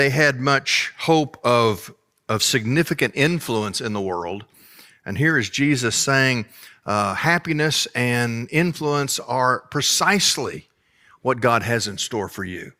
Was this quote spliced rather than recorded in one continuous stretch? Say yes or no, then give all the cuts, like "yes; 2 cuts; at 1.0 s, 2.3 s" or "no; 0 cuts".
no; 0 cuts